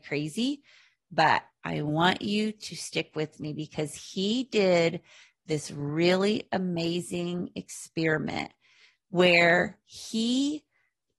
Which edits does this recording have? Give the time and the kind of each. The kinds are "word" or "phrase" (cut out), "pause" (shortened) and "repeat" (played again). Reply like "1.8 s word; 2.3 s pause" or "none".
none